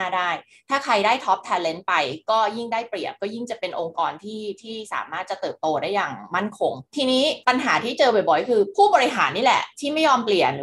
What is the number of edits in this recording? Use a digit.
1